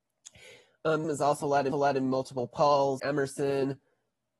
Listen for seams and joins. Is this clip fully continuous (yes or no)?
no